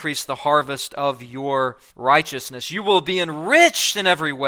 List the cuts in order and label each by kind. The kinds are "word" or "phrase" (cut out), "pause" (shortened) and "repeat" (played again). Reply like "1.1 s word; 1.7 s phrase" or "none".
1.9 s pause